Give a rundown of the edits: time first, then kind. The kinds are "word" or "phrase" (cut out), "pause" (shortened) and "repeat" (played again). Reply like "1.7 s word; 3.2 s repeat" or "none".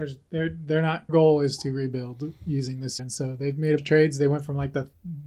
1.1 s word; 2.4 s pause; 3.0 s word; 3.8 s word